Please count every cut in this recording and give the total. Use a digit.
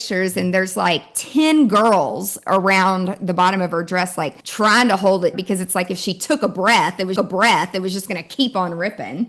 3